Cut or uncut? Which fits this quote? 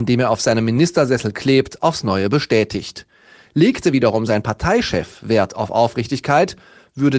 uncut